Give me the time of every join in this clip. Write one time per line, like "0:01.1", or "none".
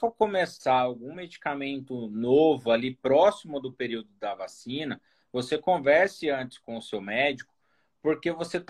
none